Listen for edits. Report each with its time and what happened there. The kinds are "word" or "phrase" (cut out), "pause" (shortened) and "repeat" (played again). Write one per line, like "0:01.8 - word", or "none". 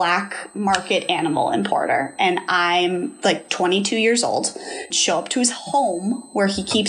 0:04.9 - word